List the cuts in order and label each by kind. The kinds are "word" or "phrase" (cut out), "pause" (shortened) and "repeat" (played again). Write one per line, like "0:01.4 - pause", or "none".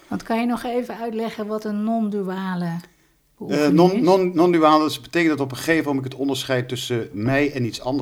none